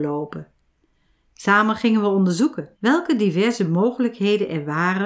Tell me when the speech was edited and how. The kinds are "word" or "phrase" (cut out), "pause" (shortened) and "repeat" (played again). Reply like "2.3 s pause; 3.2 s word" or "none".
2.7 s pause